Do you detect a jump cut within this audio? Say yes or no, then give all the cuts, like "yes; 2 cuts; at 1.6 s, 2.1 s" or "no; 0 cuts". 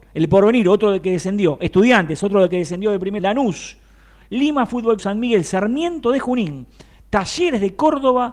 yes; 2 cuts; at 3.2 s, 5.0 s